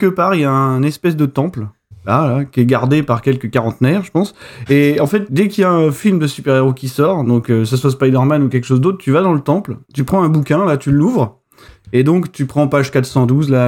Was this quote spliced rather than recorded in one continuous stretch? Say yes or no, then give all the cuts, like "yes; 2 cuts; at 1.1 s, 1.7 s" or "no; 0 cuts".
yes; 1 cut; at 9.8 s